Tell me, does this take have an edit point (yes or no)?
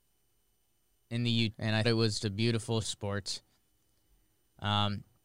yes